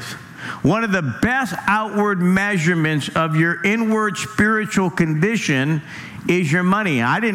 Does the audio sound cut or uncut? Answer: uncut